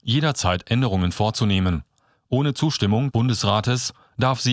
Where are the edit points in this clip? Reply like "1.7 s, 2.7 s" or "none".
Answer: 3.1 s